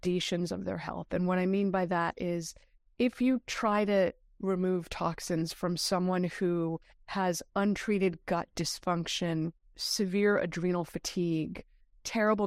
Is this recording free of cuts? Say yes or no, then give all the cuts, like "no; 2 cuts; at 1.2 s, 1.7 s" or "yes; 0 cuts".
yes; 0 cuts